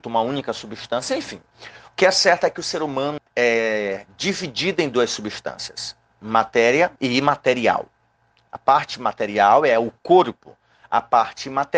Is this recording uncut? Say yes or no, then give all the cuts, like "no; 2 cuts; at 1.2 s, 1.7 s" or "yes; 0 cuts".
no; 2 cuts; at 3.2 s, 7.0 s